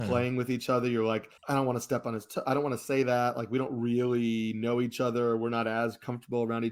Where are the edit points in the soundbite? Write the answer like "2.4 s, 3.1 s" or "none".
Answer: 1.4 s

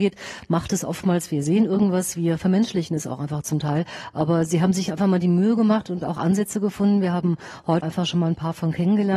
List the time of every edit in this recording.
7.8 s

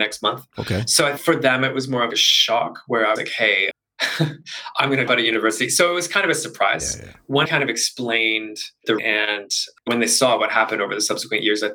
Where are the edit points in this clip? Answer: 1.2 s, 2.1 s, 3.2 s, 3.7 s, 5.1 s, 7.4 s, 9.0 s, 9.9 s

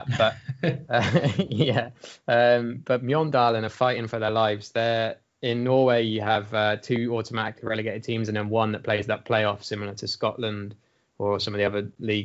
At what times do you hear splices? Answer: none

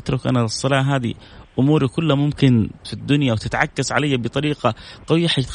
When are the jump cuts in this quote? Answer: 2.8 s

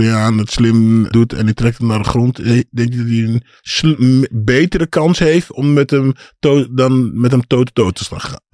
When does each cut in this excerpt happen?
1.1 s

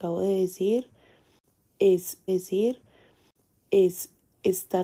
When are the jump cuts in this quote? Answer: 2.3 s

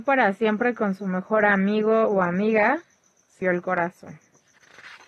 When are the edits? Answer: 3.4 s

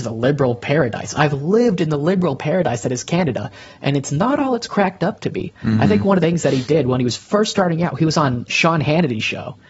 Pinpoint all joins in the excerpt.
6.2 s, 8.5 s

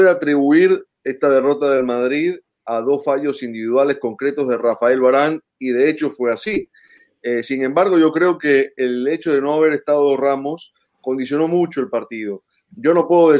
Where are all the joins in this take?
none

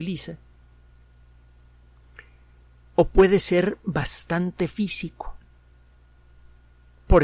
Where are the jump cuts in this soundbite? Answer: none

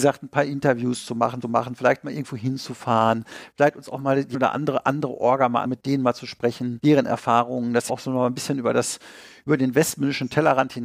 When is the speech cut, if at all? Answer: 1.4 s, 4.3 s, 5.6 s, 7.9 s

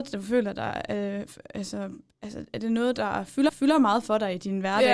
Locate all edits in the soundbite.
3.5 s

